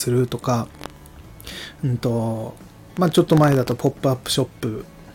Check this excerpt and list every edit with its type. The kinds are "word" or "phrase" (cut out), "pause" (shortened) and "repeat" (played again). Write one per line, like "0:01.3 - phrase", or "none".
none